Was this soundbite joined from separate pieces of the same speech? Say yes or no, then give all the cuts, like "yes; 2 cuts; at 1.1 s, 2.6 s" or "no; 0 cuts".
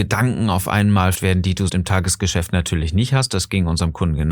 yes; 2 cuts; at 1.1 s, 1.7 s